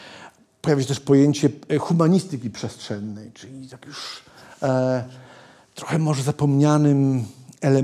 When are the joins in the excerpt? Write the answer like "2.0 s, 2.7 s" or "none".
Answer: none